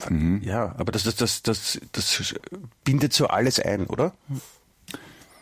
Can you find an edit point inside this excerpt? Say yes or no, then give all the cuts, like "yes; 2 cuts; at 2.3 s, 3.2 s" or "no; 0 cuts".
no; 0 cuts